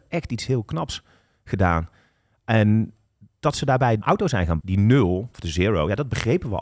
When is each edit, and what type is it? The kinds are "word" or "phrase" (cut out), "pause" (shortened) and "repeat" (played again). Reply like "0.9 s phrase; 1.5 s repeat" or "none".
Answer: 4.0 s word; 4.6 s word